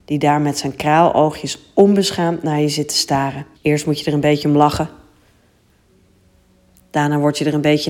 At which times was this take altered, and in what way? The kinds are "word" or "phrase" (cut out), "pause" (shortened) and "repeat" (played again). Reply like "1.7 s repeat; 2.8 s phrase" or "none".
3.5 s pause